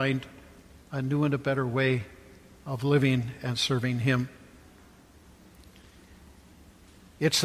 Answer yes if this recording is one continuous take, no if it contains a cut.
yes